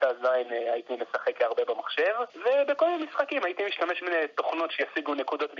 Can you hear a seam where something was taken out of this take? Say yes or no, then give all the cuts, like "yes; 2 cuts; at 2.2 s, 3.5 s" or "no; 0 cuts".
yes; 2 cuts; at 2.3 s, 4.0 s